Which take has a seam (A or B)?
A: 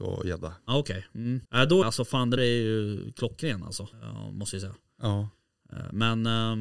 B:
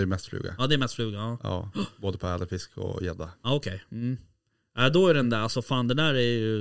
A